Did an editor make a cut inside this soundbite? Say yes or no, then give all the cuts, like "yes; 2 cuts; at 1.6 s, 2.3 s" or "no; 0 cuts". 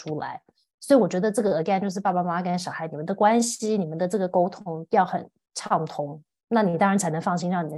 no; 0 cuts